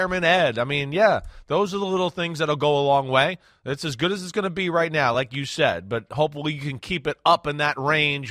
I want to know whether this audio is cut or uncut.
uncut